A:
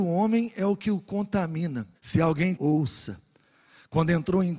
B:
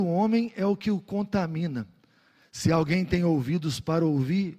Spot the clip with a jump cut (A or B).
A